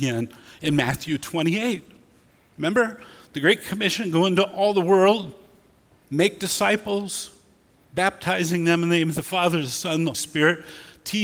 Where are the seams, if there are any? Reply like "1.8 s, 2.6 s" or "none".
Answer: 10.1 s